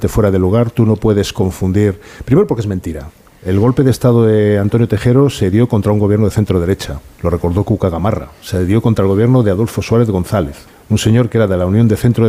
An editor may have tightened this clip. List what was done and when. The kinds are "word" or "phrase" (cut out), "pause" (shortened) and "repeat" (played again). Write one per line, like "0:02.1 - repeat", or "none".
0:03.2 - pause
0:10.7 - pause

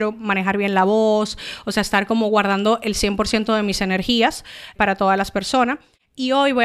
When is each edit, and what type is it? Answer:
0:04.8 - word

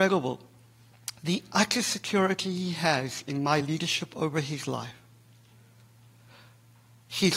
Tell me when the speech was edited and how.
none

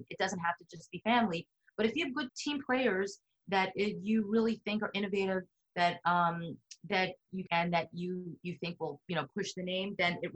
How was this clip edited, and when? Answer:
0:02.3 - word
0:07.5 - word

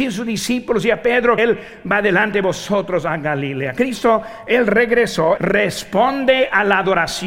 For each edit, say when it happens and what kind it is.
0:01.4 - word
0:05.4 - word

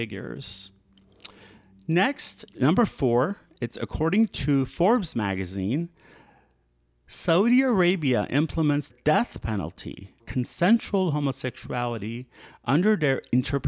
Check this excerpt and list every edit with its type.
0:02.5 - word
0:08.9 - word
0:10.2 - word

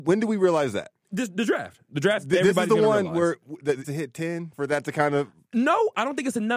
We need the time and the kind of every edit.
0:01.0 - pause
0:03.8 - word
0:04.5 - word

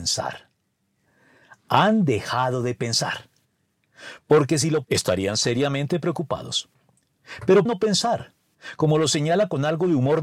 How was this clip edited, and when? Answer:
0:04.8 - word
0:07.7 - word

